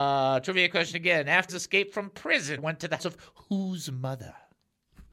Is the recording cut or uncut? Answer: cut